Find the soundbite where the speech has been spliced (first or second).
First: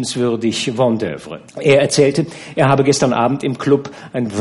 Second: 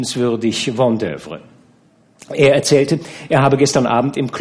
first